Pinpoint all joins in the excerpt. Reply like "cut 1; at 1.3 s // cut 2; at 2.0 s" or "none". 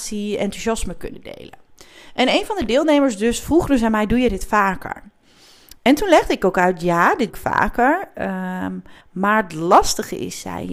cut 1; at 7.3 s // cut 2; at 9.0 s

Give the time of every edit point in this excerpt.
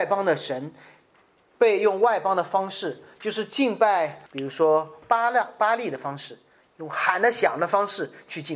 cut 1; at 4.3 s

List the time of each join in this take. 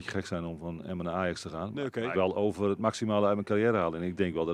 cut 1; at 2.1 s

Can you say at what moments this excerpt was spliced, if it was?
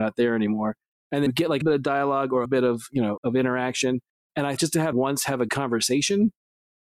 cut 1; at 1.3 s // cut 2; at 1.6 s // cut 3; at 2.4 s // cut 4; at 3.2 s // cut 5; at 4.6 s // cut 6; at 4.9 s // cut 7; at 5.5 s

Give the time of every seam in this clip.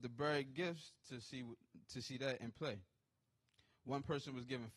none

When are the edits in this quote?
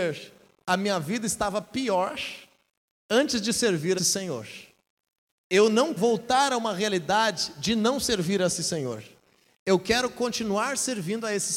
cut 1; at 4.0 s // cut 2; at 6.0 s

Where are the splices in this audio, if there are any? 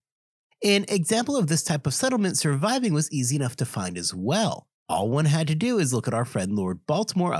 cut 1; at 4.7 s

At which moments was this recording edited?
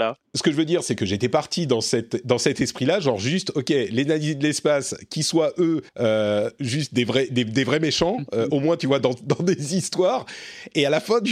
cut 1; at 5.9 s

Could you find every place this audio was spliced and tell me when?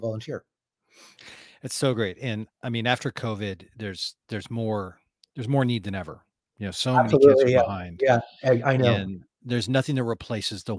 none

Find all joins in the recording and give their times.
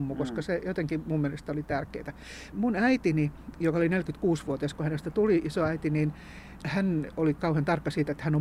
none

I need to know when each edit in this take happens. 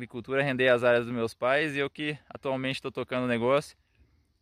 none

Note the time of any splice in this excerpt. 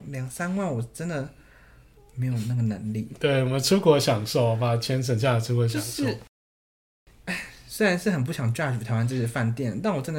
none

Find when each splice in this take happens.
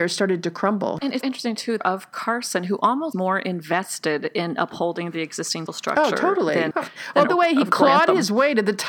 cut 1; at 1.2 s // cut 2; at 1.8 s // cut 3; at 3.1 s // cut 4; at 5.7 s // cut 5; at 6.7 s // cut 6; at 7.3 s

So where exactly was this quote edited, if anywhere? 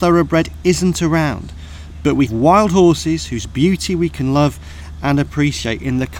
cut 1; at 2.3 s

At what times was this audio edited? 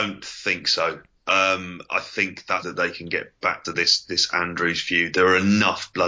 cut 1; at 2.6 s // cut 2; at 3.6 s

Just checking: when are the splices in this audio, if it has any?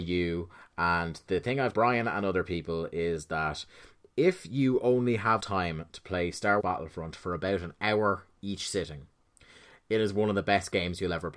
cut 1; at 1.7 s // cut 2; at 5.4 s // cut 3; at 6.6 s

